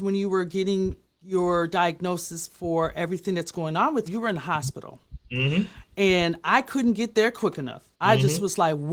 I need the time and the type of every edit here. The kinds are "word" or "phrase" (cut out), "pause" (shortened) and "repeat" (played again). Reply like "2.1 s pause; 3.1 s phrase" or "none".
4.1 s word; 7.9 s pause